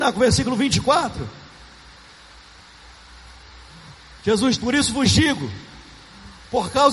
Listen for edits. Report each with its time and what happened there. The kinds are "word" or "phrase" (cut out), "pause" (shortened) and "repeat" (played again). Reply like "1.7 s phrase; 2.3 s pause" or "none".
4.6 s word